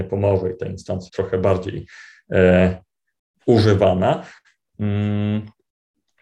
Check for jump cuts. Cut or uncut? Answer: cut